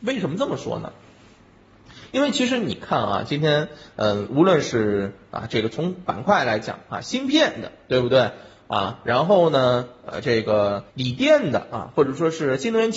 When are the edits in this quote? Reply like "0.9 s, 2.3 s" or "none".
10.9 s

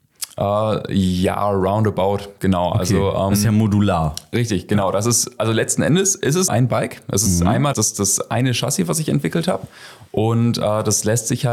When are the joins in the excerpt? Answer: 6.5 s, 7.7 s

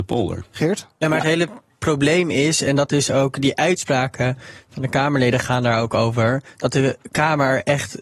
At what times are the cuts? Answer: none

